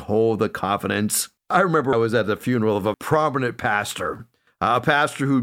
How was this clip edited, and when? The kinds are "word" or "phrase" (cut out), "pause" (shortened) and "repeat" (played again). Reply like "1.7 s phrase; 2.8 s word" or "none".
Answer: 1.4 s pause; 1.9 s word; 2.9 s word